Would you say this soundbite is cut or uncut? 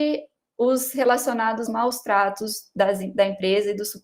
cut